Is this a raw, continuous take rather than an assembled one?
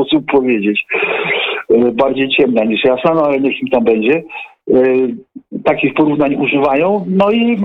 yes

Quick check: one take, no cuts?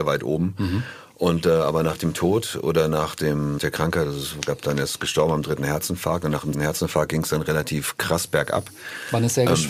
no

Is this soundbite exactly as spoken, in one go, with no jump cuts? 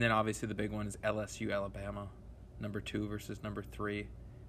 yes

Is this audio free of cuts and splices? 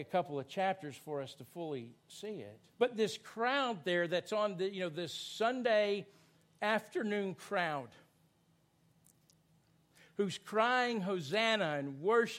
no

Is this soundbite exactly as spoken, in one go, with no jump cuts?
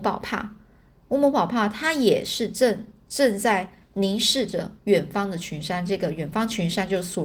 no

